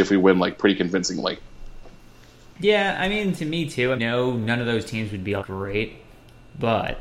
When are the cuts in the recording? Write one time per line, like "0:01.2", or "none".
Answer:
0:04.0
0:05.4